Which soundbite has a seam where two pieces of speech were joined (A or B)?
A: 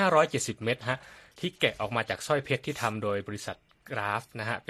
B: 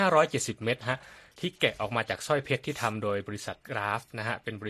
B